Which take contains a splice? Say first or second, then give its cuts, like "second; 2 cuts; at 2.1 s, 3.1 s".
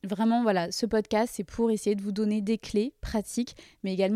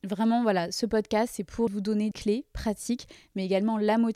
second; 2 cuts; at 1.7 s, 2.1 s